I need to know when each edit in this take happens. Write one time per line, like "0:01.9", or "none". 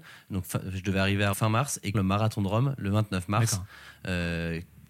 0:01.3
0:01.9